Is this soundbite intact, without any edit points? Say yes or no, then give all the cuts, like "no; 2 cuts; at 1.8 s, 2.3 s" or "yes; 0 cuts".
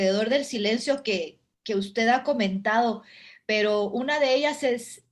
yes; 0 cuts